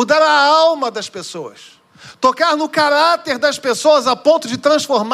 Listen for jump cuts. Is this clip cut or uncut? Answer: uncut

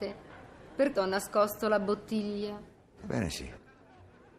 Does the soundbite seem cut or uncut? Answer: cut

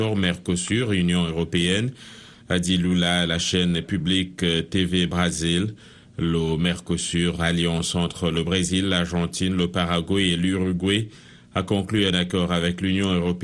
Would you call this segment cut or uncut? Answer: uncut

